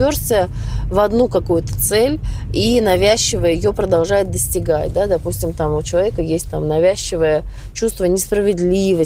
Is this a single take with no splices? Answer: yes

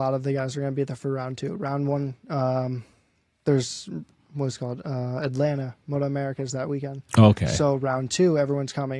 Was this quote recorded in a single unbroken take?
yes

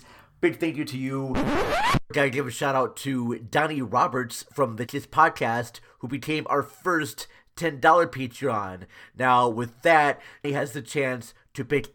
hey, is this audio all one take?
no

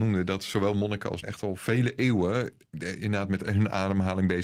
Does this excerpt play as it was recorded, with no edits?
no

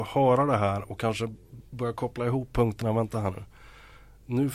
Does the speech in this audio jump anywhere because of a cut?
no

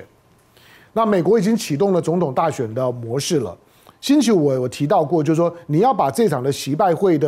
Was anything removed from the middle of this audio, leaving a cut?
no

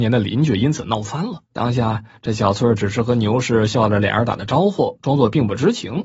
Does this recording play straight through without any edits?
no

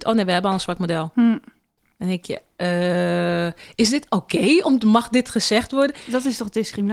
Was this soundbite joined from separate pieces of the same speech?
no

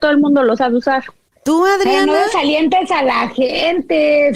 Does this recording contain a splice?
no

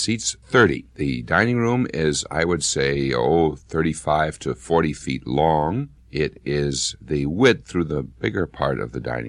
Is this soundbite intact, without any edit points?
no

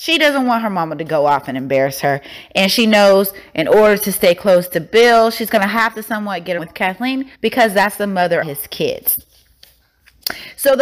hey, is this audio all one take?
no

